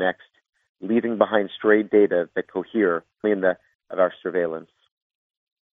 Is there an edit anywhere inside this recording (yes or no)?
yes